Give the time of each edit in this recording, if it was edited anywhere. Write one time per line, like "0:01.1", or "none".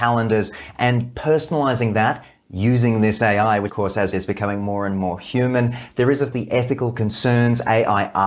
0:03.7
0:04.1
0:06.3

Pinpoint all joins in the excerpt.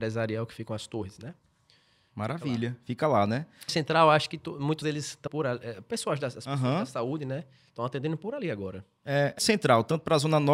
0:03.7
0:04.8
0:05.3
0:09.4

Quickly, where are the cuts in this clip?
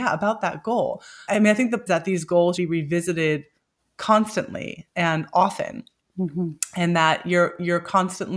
0:01.3
0:01.9
0:02.6

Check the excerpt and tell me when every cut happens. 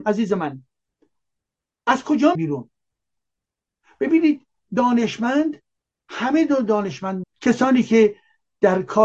0:02.3
0:05.8
0:07.2

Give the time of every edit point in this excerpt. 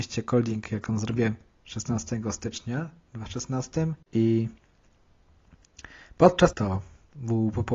0:04.0
0:06.5

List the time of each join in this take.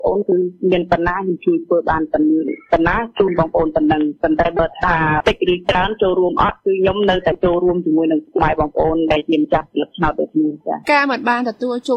0:10.8

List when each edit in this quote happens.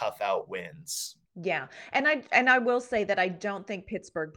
0:01.3

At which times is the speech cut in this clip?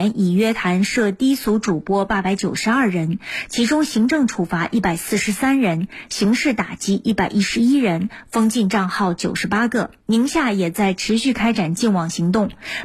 0:10.0

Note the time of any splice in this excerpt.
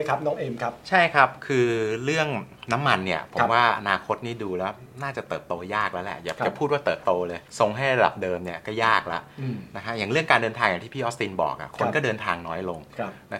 0:07.5

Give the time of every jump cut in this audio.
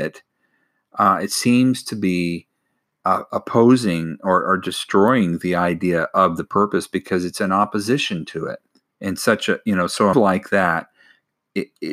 0:08.7
0:10.1

